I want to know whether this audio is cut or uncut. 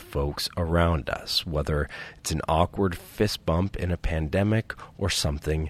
uncut